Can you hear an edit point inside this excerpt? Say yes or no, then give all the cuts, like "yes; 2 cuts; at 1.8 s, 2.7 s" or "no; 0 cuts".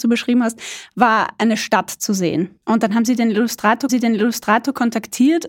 yes; 2 cuts; at 2.6 s, 3.9 s